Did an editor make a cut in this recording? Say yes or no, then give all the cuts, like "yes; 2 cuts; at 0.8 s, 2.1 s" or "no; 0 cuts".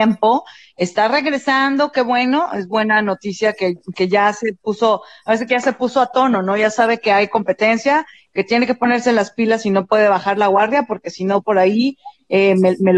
no; 0 cuts